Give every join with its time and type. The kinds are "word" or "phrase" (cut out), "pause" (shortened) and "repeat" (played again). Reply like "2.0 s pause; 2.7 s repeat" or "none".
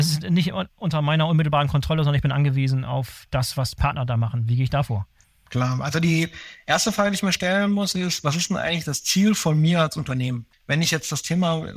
none